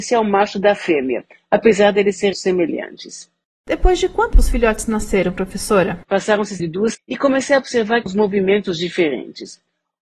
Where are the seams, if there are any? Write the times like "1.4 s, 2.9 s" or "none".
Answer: 2.3 s, 4.3 s, 6.6 s, 6.9 s, 8.1 s